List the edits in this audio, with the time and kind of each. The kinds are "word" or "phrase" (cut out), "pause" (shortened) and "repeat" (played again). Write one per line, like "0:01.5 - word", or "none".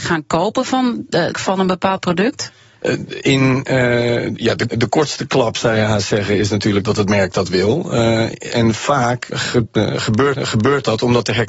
0:01.3 - phrase
0:04.7 - word
0:09.3 - word
0:10.4 - repeat